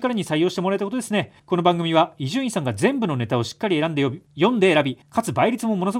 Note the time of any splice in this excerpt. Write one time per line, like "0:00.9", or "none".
0:01.4
0:04.3
0:05.0